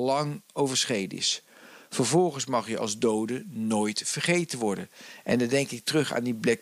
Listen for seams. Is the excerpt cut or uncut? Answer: uncut